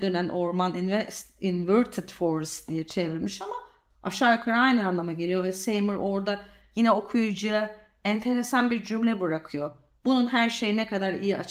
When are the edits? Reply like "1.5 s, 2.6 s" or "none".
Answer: none